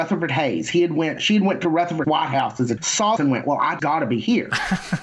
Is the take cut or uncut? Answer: cut